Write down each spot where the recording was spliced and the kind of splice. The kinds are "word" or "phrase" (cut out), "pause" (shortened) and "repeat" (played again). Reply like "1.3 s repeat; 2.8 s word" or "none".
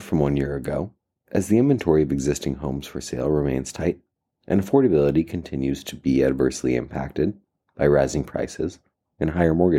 none